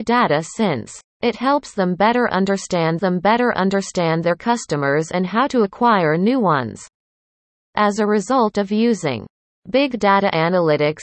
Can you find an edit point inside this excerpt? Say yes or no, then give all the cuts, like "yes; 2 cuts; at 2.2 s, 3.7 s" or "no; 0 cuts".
yes; 2 cuts; at 1.1 s, 3.0 s